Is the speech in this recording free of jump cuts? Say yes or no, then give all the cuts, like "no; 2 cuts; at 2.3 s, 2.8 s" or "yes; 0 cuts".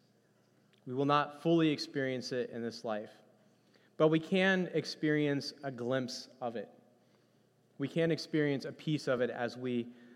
yes; 0 cuts